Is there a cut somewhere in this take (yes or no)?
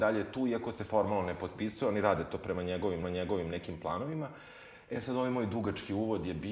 yes